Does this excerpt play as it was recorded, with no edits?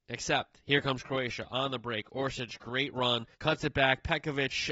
no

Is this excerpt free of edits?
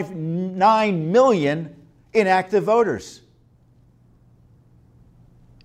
yes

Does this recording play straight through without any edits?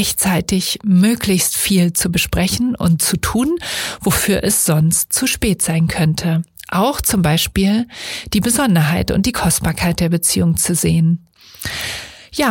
yes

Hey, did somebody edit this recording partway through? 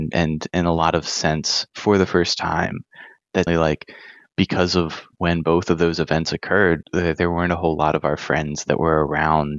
yes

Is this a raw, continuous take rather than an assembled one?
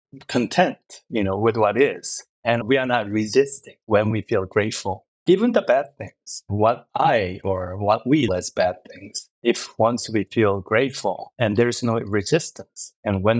no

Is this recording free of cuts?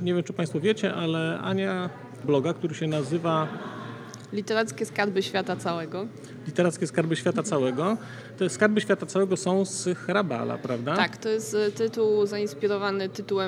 no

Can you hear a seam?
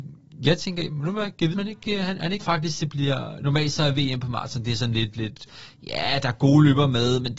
yes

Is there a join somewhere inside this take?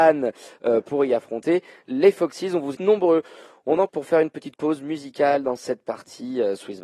yes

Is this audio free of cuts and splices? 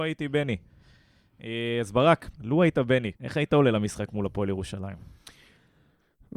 no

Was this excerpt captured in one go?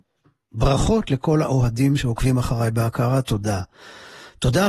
yes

